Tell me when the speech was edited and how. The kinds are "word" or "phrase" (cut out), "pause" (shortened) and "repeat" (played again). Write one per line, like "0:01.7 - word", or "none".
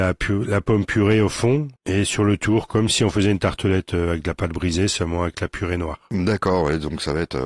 0:01.8 - pause